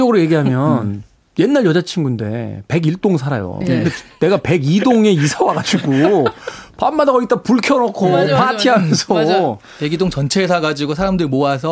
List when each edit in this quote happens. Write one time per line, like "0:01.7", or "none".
none